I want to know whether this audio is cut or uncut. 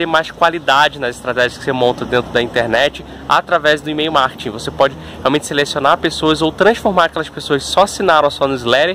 uncut